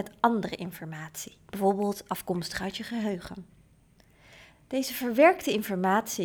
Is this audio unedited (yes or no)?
yes